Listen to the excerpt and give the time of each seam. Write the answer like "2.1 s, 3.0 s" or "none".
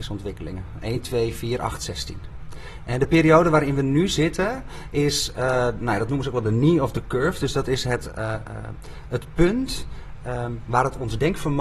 none